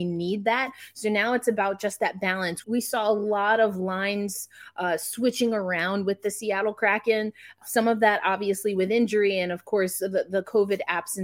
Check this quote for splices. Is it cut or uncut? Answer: cut